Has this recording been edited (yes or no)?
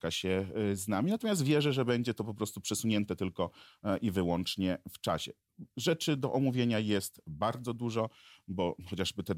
no